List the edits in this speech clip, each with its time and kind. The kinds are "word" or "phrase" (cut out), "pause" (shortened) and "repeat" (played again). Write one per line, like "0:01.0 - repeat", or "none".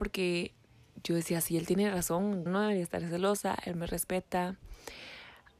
0:02.5 - word